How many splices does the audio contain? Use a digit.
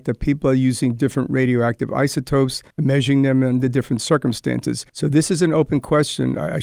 2